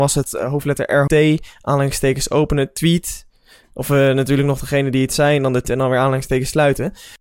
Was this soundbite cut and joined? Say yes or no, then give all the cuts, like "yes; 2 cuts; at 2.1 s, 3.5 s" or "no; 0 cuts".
yes; 2 cuts; at 1.1 s, 5.6 s